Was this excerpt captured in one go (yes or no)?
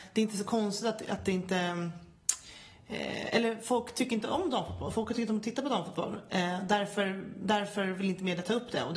yes